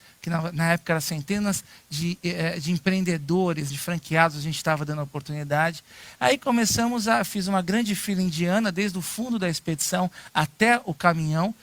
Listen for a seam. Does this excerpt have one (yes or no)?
yes